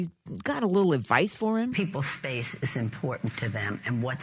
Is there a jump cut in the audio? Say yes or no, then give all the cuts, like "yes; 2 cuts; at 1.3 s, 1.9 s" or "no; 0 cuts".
no; 0 cuts